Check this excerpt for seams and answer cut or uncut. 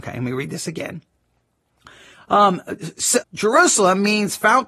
cut